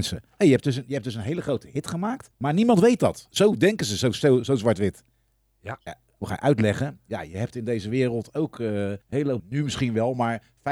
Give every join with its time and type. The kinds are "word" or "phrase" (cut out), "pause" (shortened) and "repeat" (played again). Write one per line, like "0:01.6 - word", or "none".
0:02.3 - pause
0:09.0 - pause
0:09.4 - word

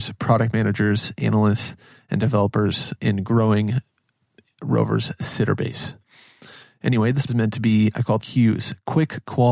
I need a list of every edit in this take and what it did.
0:03.0 - word
0:07.3 - word
0:08.2 - phrase

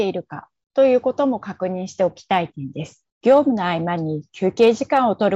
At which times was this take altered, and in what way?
0:03.1 - pause

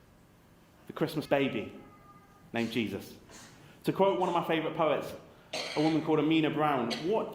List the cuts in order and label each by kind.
0:01.3 - phrase

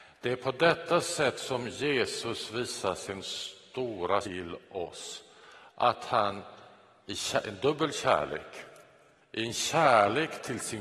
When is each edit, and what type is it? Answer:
0:04.2 - word

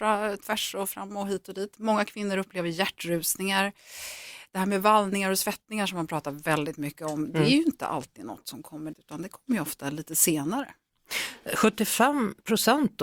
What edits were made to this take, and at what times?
0:08.9 - word

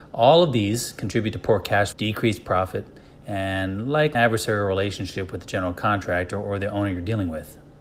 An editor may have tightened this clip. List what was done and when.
0:01.9 - word
0:04.1 - word

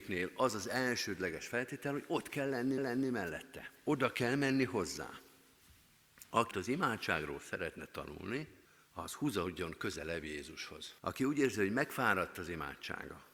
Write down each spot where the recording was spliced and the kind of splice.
0:02.8 - repeat
0:06.5 - word
0:08.6 - pause
0:11.0 - pause

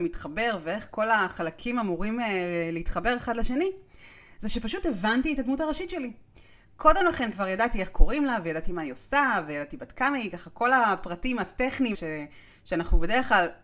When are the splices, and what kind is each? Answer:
0:11.9 - word

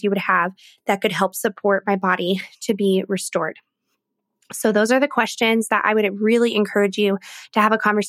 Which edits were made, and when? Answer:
none

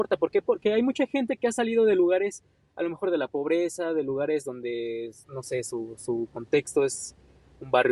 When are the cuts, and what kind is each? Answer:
none

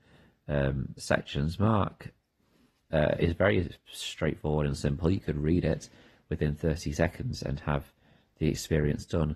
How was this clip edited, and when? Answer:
none

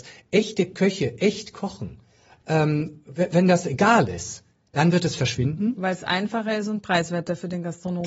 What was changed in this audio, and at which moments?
none

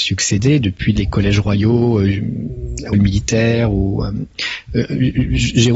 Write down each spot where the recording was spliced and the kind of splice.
0:01.0 - word
0:02.9 - word

